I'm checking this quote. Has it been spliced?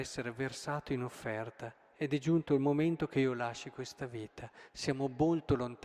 no; 0 cuts

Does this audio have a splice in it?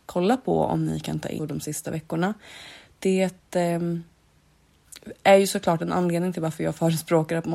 yes; 1 cut; at 1.4 s

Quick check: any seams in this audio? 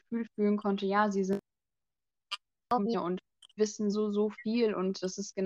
yes; 2 cuts; at 3.6 s, 3.9 s

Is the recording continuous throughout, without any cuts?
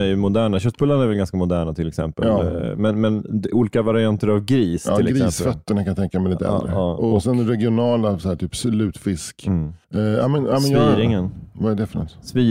no; 1 cut; at 9.8 s

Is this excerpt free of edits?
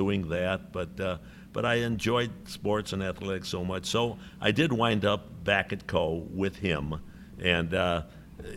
yes; 0 cuts

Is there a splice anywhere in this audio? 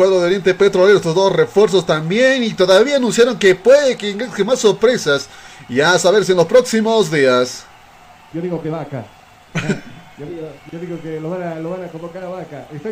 no; 0 cuts

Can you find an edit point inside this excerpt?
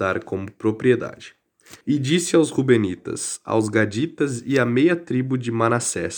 yes; 1 cut; at 1.8 s

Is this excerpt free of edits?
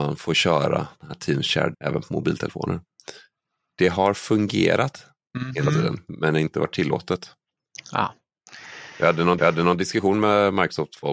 no; 3 cuts; at 1.7 s, 5.2 s, 9.4 s

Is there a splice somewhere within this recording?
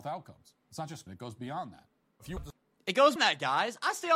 yes; 3 cuts; at 1.1 s, 2.4 s, 3.2 s

